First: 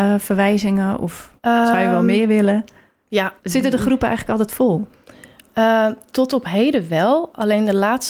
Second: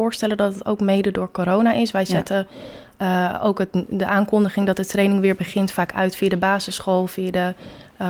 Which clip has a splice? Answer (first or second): first